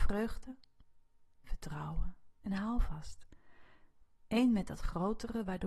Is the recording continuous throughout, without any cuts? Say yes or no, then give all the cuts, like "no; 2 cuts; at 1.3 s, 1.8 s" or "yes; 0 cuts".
yes; 0 cuts